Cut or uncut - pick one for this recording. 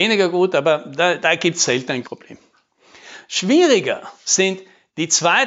cut